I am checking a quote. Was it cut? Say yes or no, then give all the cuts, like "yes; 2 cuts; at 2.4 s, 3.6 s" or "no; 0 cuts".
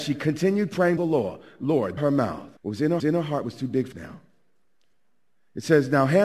yes; 5 cuts; at 1.0 s, 2.0 s, 2.6 s, 3.0 s, 3.9 s